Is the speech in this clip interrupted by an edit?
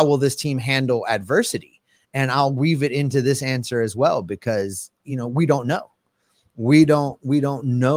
no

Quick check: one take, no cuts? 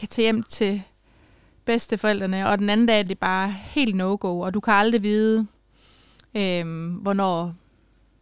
no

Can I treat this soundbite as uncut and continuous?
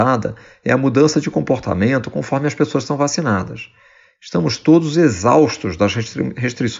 yes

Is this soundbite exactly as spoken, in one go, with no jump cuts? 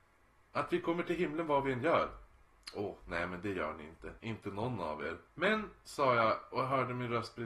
no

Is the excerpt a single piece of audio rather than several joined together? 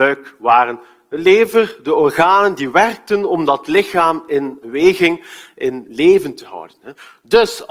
yes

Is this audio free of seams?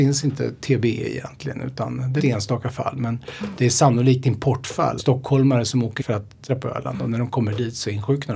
no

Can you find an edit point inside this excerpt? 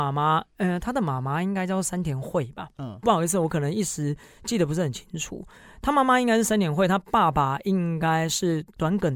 no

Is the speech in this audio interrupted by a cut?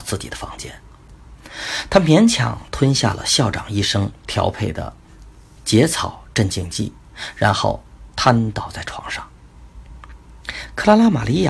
no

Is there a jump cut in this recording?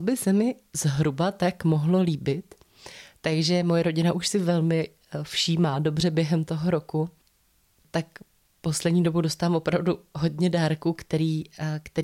no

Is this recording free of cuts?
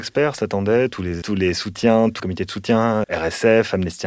no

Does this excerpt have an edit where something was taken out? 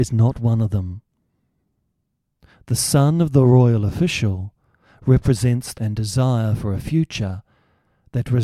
yes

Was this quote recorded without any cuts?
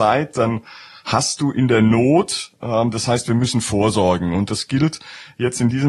yes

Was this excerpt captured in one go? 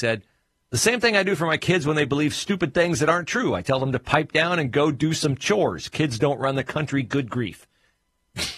yes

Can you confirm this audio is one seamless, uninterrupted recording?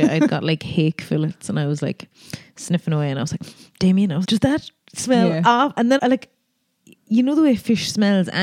no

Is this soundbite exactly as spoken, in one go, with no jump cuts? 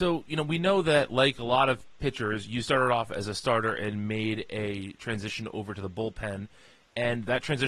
yes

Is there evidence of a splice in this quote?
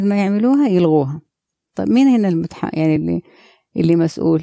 no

